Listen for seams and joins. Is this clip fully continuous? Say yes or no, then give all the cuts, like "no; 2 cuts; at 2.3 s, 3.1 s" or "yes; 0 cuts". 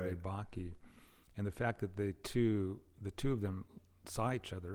yes; 0 cuts